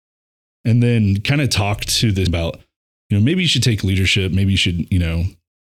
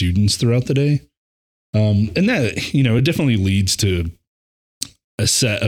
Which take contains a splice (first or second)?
first